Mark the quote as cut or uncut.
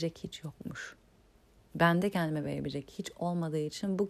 uncut